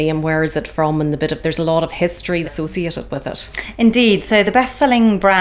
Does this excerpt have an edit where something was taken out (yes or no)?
yes